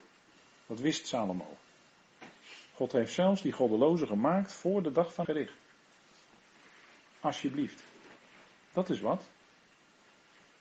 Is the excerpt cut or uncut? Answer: cut